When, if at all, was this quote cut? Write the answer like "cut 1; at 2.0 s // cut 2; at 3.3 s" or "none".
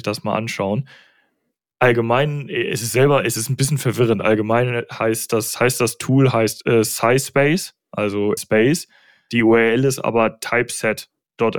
cut 1; at 8.4 s